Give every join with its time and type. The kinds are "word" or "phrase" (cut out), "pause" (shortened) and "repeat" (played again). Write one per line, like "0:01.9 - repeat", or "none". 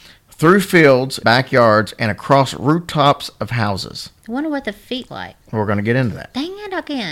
0:01.2 - word
0:04.2 - pause
0:05.1 - word
0:05.4 - pause